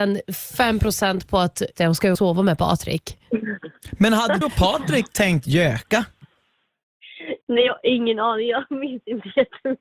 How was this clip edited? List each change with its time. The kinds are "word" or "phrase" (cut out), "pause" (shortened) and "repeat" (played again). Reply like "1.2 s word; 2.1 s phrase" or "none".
1.8 s word; 2.2 s word; 4.4 s word